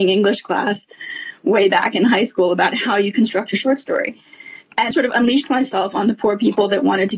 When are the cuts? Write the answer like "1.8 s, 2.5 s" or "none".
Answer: 4.9 s